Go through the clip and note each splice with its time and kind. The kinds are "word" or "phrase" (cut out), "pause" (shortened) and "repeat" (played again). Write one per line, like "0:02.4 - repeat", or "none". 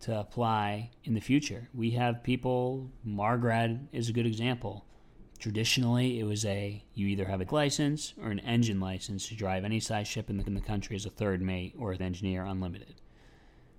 0:01.0 - pause
0:06.9 - pause
0:07.5 - word
0:10.5 - repeat
0:12.0 - word